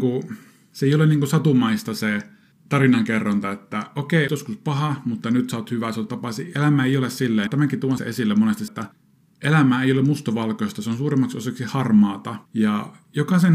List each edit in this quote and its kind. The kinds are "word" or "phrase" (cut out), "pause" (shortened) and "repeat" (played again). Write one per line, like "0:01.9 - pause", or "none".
0:02.5 - pause
0:04.3 - word
0:06.1 - word
0:07.5 - word
0:08.0 - word
0:08.7 - word
0:12.5 - pause

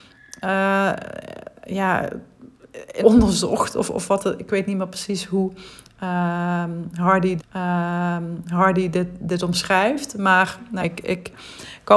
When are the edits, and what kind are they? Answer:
0:01.6 - pause
0:03.0 - phrase
0:07.4 - repeat
0:10.8 - word

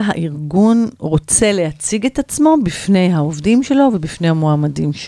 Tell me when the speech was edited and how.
none

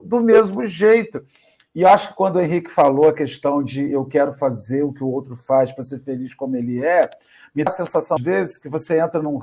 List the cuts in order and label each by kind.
0:07.7 - word
0:08.2 - word

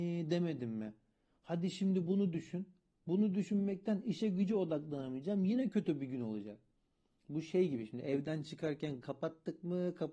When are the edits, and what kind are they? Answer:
0:09.0 - word

